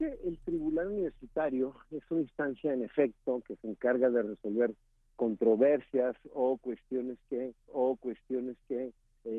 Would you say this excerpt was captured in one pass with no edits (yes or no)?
no